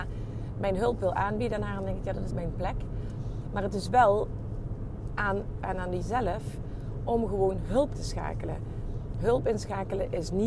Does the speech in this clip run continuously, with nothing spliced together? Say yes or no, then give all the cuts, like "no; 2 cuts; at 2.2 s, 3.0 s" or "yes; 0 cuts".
no; 4 cuts; at 2.3 s, 5.6 s, 6.0 s, 7.9 s